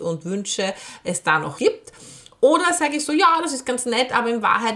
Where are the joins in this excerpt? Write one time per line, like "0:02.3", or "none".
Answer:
0:01.6